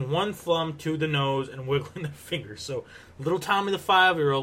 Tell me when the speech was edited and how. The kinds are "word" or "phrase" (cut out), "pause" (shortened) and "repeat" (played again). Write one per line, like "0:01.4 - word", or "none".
none